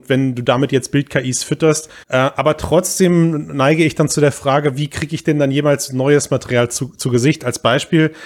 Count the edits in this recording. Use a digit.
1